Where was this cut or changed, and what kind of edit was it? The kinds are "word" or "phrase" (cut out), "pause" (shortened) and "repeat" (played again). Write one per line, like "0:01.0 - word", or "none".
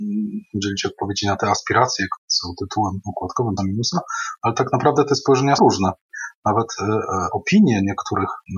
0:02.2 - word
0:03.6 - word
0:05.6 - word